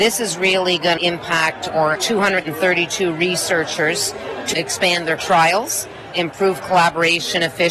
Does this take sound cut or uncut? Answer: cut